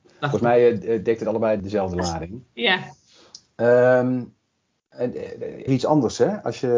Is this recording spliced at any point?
yes; 2 cuts; at 1.6 s, 5.7 s

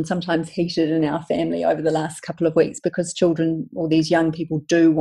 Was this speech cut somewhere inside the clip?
no; 0 cuts

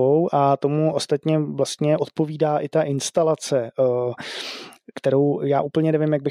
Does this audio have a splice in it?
no; 0 cuts

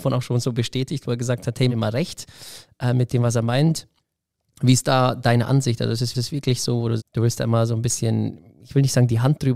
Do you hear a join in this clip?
yes; 3 cuts; at 1.7 s, 6.1 s, 7.0 s

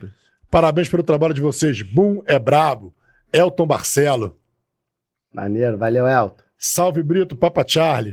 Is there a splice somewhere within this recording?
no; 0 cuts

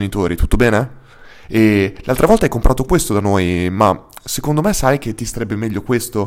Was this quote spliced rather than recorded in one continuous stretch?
no; 0 cuts

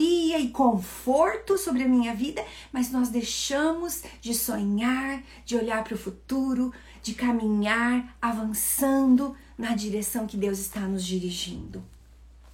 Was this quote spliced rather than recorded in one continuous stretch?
no; 0 cuts

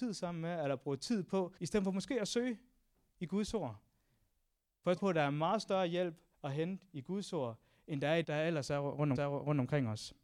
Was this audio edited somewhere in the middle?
yes; 5 cuts; at 1.6 s, 5.0 s, 6.3 s, 8.2 s, 9.2 s

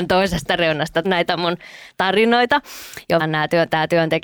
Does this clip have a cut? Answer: yes; 2 cuts; at 1.0 s, 3.2 s

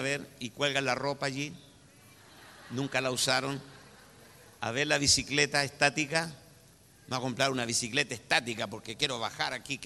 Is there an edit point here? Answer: no; 0 cuts

